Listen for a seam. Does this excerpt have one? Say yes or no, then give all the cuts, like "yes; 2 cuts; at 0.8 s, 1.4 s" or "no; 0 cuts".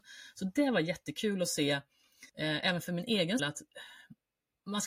yes; 2 cuts; at 2.3 s, 3.4 s